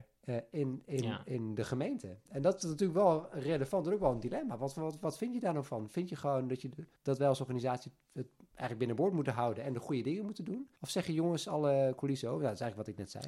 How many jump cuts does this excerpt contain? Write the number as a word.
two